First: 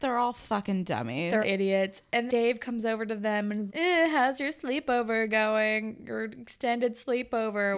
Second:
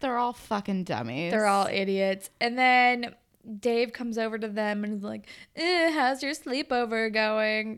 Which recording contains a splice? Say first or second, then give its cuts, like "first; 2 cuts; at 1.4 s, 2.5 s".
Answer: first; 3 cuts; at 1.4 s, 2.3 s, 3.7 s